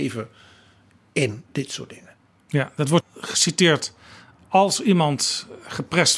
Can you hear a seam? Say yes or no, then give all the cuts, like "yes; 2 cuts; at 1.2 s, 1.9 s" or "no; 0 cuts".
no; 0 cuts